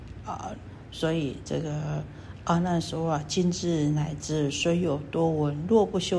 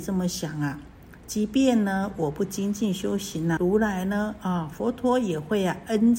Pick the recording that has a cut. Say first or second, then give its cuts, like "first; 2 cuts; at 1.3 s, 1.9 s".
second; 1 cut; at 3.6 s